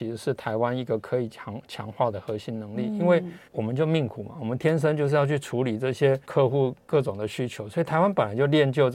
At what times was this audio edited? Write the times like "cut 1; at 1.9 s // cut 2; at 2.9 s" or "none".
cut 1; at 3.4 s // cut 2; at 6.2 s